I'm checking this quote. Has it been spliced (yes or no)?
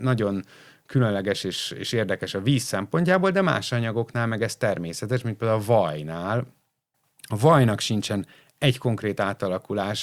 no